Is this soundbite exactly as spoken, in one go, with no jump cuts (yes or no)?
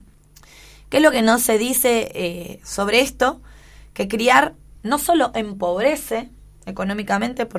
yes